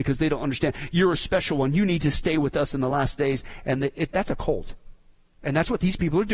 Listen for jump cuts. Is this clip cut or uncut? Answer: uncut